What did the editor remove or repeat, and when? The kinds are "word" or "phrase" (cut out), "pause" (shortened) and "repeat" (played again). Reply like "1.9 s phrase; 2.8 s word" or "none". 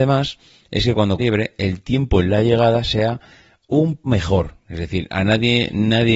1.2 s phrase; 4.1 s word